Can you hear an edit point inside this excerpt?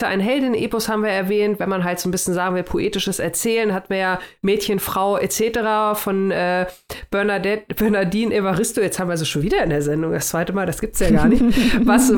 no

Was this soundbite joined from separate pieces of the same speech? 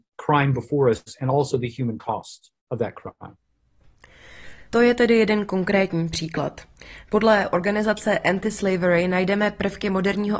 yes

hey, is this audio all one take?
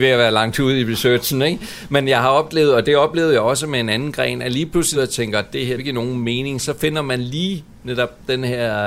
no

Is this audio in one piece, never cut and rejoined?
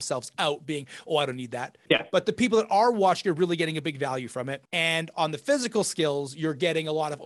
yes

